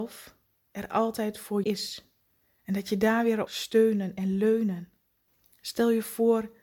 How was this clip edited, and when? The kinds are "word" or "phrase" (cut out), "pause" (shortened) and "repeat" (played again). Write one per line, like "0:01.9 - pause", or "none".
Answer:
0:01.6 - word
0:02.3 - pause
0:03.5 - word